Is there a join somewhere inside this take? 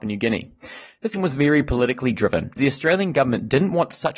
yes; 2 cuts; at 1.1 s, 2.6 s

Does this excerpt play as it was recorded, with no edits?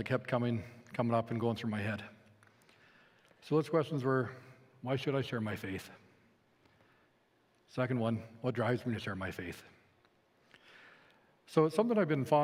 yes; 0 cuts

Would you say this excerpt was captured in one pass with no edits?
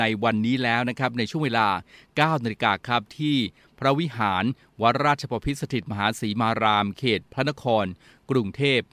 yes; 0 cuts

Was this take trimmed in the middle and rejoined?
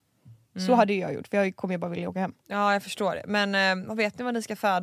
yes; 1 cut; at 2.4 s

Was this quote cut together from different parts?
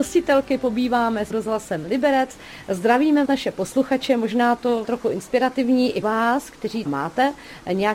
yes; 5 cuts; at 1.3 s, 3.3 s, 4.8 s, 6.0 s, 6.9 s

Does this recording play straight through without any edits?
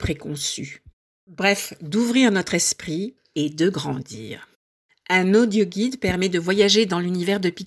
yes; 0 cuts

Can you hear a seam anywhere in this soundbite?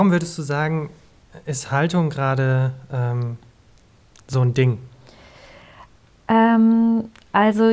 no; 0 cuts

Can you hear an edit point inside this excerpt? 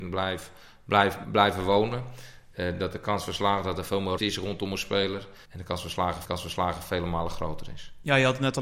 yes; 4 cuts; at 1.2 s, 4.2 s, 5.4 s, 6.2 s

